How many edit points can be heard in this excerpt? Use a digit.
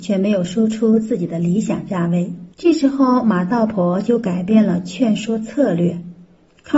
1